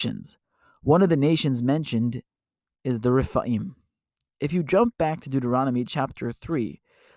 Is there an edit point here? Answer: no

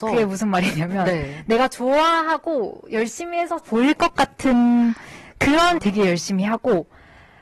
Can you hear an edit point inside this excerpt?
yes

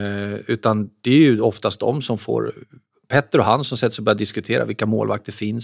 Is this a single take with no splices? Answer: yes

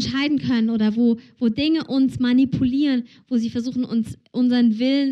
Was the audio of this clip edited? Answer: no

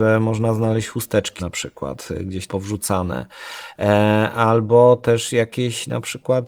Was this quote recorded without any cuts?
no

